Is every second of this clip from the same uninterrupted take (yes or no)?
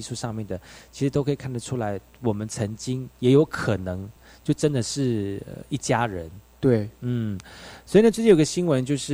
yes